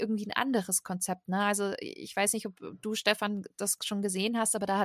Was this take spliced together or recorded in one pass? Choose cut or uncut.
uncut